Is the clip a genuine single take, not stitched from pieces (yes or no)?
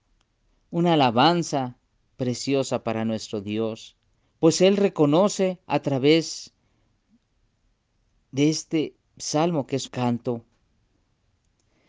no